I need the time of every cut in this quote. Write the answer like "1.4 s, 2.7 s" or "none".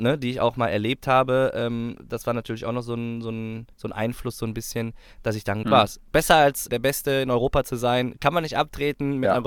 3.7 s, 5.6 s, 6.7 s